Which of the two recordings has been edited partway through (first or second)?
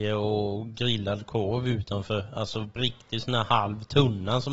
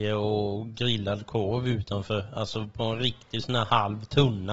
first